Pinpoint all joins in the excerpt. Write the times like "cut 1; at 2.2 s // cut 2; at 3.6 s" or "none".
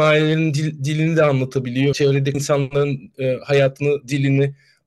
cut 1; at 1.9 s // cut 2; at 2.3 s